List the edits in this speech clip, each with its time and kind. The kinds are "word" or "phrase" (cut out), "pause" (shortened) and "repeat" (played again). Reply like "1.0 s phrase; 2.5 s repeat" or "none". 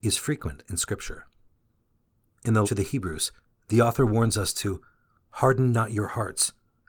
2.6 s word